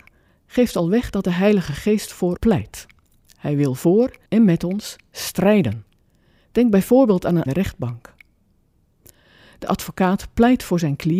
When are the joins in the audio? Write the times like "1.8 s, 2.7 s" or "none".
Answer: 2.4 s, 4.3 s, 6.0 s, 7.5 s